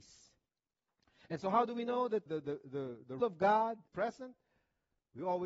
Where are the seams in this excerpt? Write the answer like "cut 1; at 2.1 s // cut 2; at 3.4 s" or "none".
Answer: cut 1; at 2.3 s // cut 2; at 3.2 s // cut 3; at 3.9 s